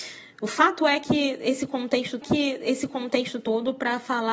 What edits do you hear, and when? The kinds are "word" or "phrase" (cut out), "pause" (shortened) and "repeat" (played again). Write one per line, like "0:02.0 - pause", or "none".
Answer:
0:02.2 - repeat